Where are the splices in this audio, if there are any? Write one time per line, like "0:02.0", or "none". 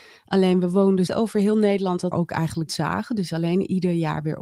0:01.1
0:02.1
0:02.7

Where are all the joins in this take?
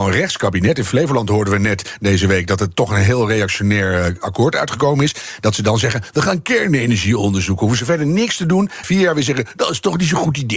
0:08.8

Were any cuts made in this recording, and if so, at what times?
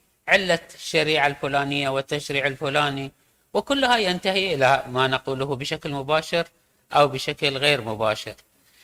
none

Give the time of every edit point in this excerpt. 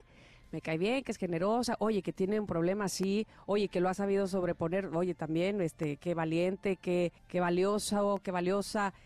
0:07.2

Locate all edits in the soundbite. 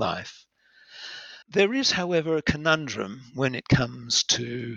0:01.4

